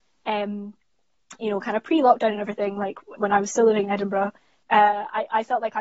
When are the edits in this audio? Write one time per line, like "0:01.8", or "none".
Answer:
0:03.2
0:04.6